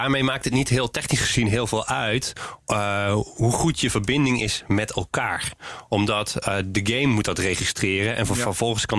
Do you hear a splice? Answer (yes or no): yes